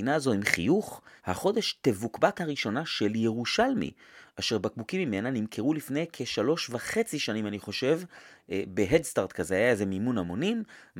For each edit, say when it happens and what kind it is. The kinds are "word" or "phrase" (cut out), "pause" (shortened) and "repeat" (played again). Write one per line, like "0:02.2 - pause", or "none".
0:01.2 - pause
0:02.3 - word